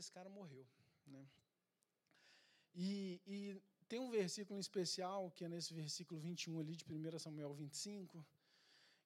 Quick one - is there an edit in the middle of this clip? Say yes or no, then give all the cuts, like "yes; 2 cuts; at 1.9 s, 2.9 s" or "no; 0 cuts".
no; 0 cuts